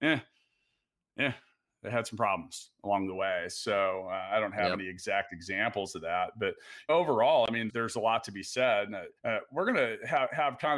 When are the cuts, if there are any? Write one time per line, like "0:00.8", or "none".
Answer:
0:06.9
0:07.7
0:09.2

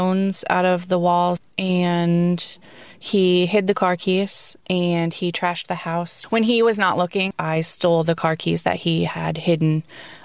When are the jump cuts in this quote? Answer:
none

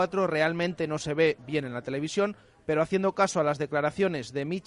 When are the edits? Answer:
none

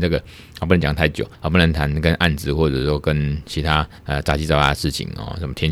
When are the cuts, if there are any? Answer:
0:01.3
0:04.0

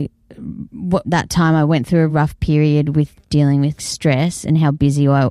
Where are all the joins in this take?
0:01.0
0:02.1
0:03.8

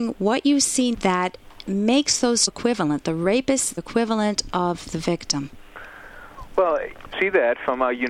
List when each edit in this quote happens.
0:00.9
0:02.5
0:03.8
0:07.1

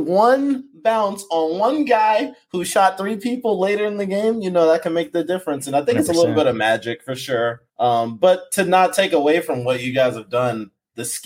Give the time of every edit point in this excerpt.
0:07.7

